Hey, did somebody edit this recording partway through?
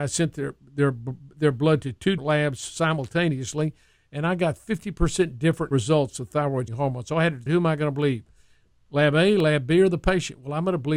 yes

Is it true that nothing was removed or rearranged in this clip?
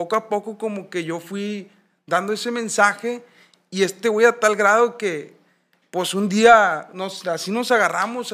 yes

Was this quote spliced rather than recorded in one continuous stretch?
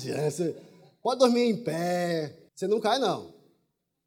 yes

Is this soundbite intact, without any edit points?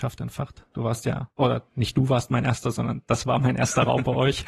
yes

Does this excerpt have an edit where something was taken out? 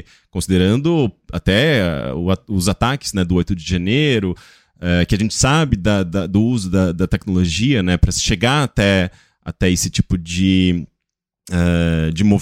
no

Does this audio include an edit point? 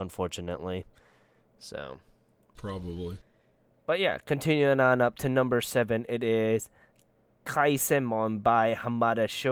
no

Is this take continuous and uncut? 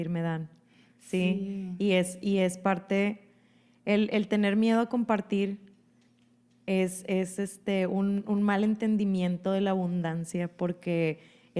yes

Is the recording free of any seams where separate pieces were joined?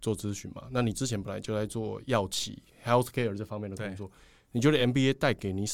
yes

